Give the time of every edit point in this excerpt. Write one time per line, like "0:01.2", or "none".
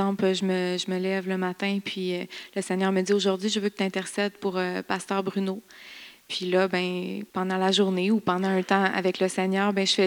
0:07.3

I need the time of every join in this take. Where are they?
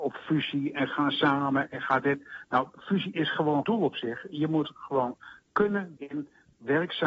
0:03.6
0:06.0

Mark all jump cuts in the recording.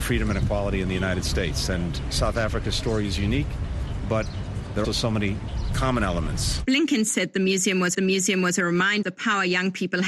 0:04.8
0:07.9
0:09.0

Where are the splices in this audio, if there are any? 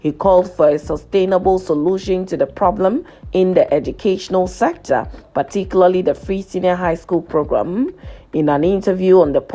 none

